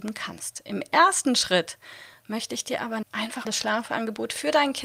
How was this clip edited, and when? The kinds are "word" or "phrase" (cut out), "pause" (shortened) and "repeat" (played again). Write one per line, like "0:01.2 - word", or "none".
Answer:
0:03.0 - word
0:03.4 - word

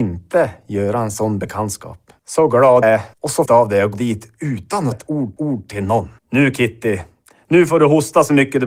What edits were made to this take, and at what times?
0:02.2 - pause
0:02.8 - word
0:03.1 - pause
0:03.5 - word
0:03.9 - word
0:04.9 - word
0:05.4 - repeat
0:06.2 - pause

